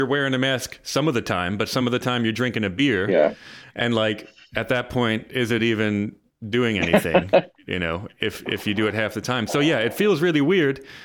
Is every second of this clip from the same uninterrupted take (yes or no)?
yes